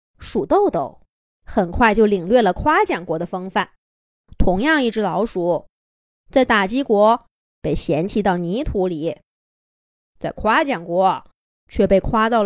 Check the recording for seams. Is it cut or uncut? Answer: uncut